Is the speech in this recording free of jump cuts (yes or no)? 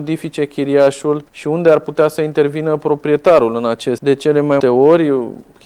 no